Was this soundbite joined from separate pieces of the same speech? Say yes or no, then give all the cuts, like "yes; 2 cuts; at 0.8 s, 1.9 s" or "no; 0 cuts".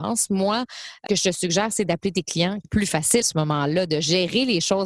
yes; 3 cuts; at 1.1 s, 2.6 s, 3.2 s